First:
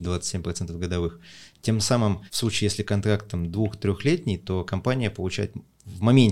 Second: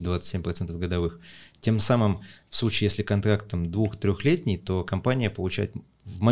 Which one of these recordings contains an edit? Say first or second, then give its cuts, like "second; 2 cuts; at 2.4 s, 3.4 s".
first; 1 cut; at 2.3 s